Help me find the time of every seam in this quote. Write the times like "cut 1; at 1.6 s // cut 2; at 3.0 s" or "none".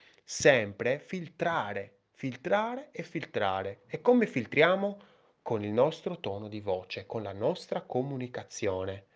cut 1; at 2.1 s